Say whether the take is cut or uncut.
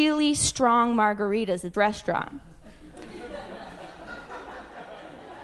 cut